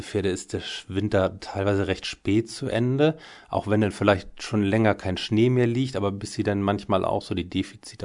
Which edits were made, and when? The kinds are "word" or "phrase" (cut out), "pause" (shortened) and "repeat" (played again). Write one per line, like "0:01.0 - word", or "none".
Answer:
none